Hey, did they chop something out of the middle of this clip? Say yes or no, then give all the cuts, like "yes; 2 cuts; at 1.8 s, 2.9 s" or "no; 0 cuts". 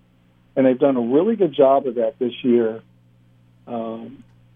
no; 0 cuts